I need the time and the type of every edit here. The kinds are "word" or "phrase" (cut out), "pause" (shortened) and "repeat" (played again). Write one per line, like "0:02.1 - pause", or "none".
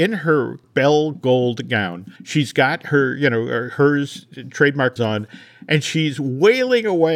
0:02.2 - pause
0:05.0 - word